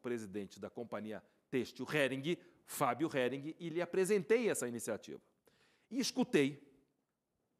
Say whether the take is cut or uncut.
uncut